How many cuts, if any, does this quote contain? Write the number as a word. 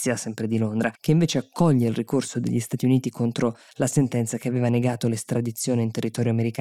one